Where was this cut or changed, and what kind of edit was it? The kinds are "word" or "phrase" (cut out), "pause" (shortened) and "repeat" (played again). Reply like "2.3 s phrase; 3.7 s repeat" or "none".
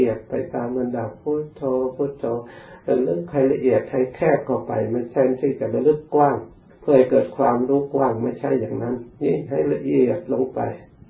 6.7 s pause; 9.1 s pause